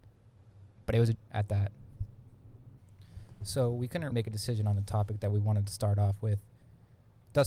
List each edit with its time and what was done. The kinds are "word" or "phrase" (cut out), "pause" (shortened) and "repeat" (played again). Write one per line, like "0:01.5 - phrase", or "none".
0:01.1 - word
0:04.1 - word